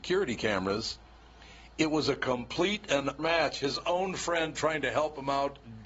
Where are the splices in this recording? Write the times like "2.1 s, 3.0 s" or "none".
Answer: 3.2 s